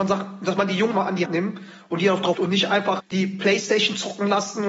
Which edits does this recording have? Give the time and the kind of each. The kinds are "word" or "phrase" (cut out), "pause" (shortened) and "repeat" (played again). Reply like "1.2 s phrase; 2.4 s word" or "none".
0.9 s word; 1.2 s word; 2.3 s word; 3.0 s word